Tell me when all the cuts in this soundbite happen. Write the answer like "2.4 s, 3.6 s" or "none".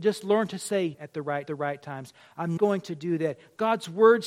0.9 s, 1.5 s, 2.6 s